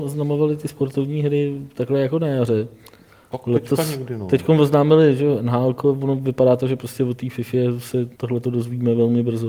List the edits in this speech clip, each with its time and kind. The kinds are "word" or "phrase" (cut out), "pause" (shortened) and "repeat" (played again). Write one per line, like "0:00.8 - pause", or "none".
0:08.1 - pause